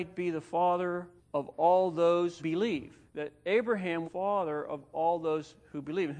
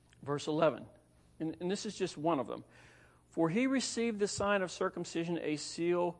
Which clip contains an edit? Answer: first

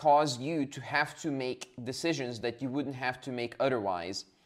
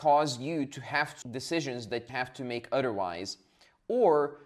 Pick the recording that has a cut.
second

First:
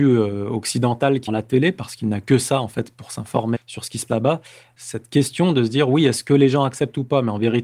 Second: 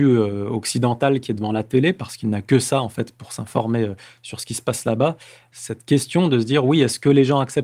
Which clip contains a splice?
first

